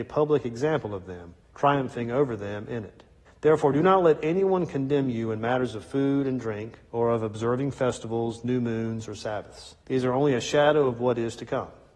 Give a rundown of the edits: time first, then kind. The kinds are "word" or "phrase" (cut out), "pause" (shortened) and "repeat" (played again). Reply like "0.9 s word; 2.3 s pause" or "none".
1.4 s pause; 3.2 s pause; 6.9 s pause; 9.8 s pause